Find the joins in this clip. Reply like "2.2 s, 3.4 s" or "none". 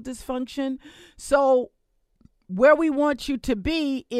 none